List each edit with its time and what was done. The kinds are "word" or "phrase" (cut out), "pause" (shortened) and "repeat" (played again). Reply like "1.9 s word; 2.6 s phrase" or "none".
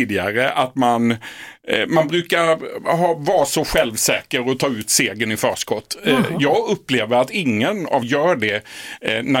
8.0 s word